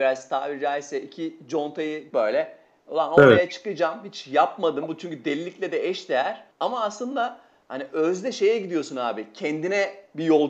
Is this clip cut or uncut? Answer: cut